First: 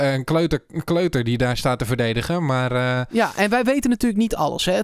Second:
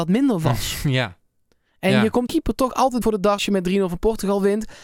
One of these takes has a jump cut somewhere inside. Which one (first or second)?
second